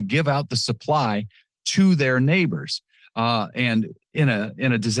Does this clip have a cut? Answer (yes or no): no